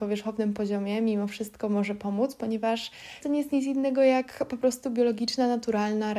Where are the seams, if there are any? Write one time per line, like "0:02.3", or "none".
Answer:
0:03.2